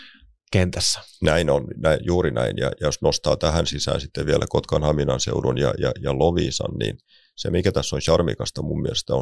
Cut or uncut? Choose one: uncut